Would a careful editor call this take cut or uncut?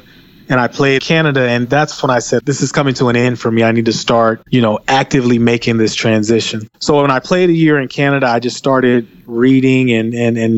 cut